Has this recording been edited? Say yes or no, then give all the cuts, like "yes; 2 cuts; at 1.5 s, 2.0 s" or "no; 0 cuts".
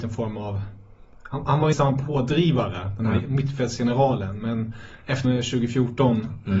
yes; 2 cuts; at 1.7 s, 5.2 s